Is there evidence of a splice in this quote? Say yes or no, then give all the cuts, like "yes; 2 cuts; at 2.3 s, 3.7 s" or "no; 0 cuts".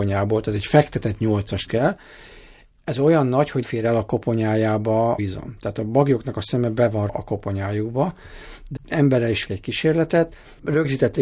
yes; 6 cuts; at 1.7 s, 3.6 s, 5.2 s, 7.1 s, 8.8 s, 9.5 s